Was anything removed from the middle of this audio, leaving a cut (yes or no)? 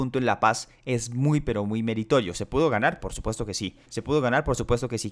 yes